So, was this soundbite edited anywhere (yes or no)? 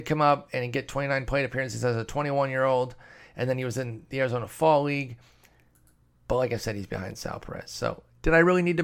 no